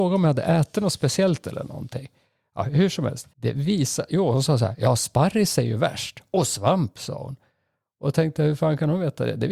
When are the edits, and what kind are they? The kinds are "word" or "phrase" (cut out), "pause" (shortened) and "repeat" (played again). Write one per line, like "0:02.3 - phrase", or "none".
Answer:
0:03.3 - pause